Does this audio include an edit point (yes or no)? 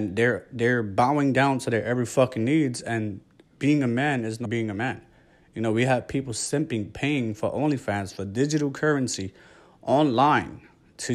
yes